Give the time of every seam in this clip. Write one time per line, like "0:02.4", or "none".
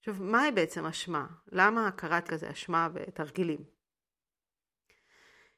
0:02.3